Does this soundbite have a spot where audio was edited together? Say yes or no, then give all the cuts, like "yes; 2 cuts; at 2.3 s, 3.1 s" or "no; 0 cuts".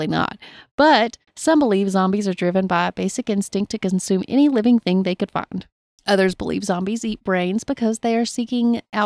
no; 0 cuts